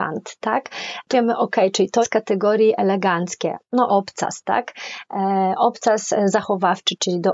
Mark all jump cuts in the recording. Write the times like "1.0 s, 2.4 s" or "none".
1.1 s, 2.0 s, 3.9 s

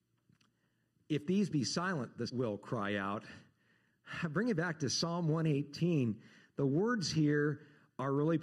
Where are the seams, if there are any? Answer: 2.3 s

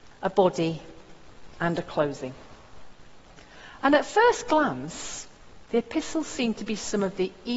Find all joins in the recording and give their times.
none

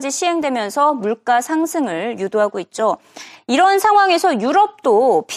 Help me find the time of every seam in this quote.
none

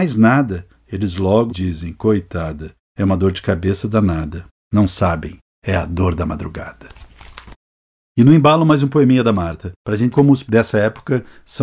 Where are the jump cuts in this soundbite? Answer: 1.5 s, 7.7 s, 10.1 s, 10.5 s

